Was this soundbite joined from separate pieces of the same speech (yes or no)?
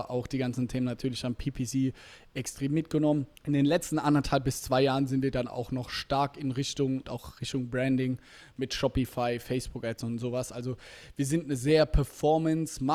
yes